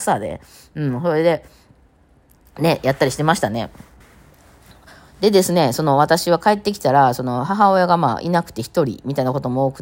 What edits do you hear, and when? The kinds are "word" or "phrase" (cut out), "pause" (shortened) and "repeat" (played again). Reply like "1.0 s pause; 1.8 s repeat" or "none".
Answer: none